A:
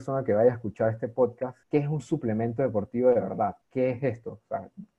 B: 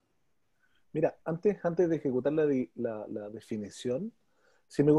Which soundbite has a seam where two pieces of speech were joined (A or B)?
A